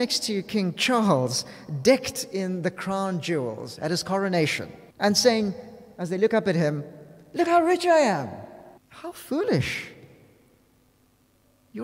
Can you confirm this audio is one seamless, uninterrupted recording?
no; 2 cuts; at 4.9 s, 8.8 s

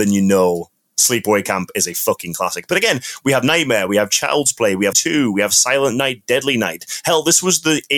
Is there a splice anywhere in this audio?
yes; 1 cut; at 4.9 s

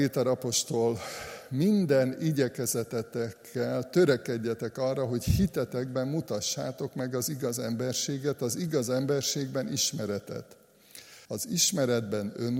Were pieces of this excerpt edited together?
yes; 1 cut; at 11.2 s

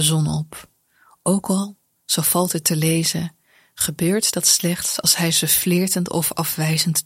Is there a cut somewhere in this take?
no; 0 cuts

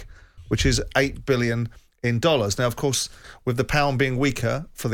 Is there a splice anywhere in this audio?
no; 0 cuts

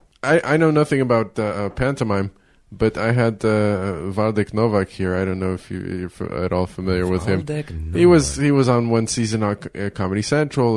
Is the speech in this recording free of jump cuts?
yes; 0 cuts

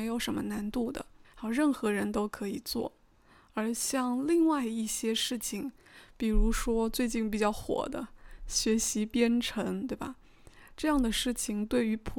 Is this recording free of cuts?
no; 1 cut; at 1.2 s

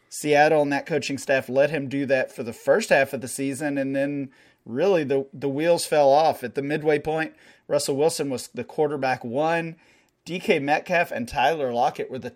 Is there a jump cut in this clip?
no; 0 cuts

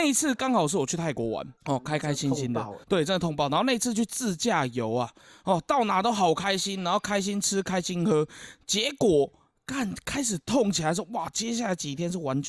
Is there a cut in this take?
yes; 2 cuts; at 1.6 s, 2.8 s

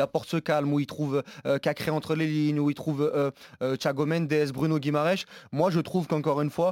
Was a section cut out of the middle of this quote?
no; 0 cuts

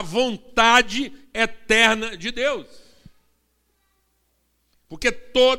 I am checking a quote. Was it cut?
no; 0 cuts

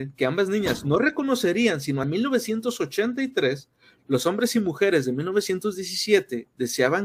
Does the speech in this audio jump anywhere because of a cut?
yes; 1 cut; at 2.0 s

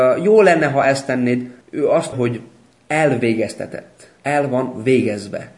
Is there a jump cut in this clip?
yes; 3 cuts; at 1.6 s, 2.1 s, 4.2 s

